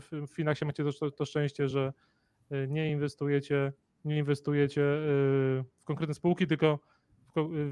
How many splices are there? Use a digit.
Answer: 0